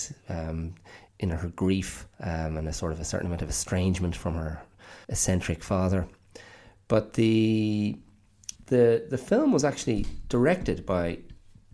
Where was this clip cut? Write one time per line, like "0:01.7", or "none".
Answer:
0:01.1
0:02.1
0:05.0
0:08.6